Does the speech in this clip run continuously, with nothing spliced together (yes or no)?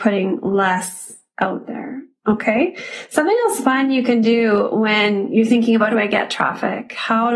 no